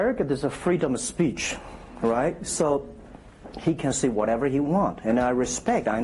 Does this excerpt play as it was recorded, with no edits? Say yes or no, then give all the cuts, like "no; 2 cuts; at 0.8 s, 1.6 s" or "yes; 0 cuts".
yes; 0 cuts